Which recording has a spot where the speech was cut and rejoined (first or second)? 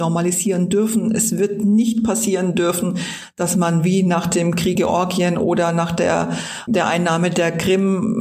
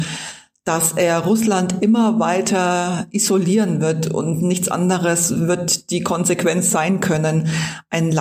first